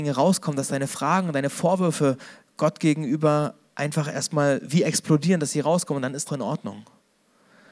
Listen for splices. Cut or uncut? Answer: cut